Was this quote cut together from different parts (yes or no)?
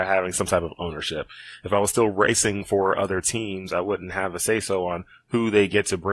no